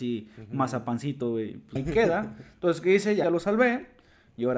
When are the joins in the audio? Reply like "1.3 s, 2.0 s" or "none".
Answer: 1.8 s, 3.2 s